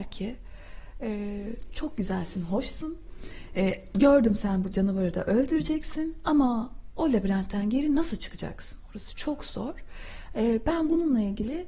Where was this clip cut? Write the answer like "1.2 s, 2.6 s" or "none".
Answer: none